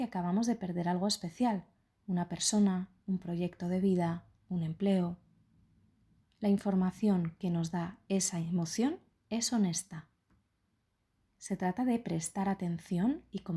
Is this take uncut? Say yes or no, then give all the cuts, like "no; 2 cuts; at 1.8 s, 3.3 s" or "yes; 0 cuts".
yes; 0 cuts